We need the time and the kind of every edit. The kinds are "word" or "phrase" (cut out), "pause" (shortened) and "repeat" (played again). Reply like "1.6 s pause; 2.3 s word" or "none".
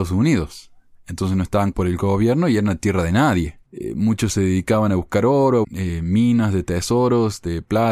1.7 s word; 3.7 s pause; 5.6 s word